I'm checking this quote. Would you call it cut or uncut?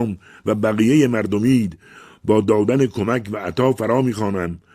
uncut